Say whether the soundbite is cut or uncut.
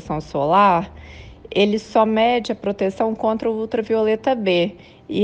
uncut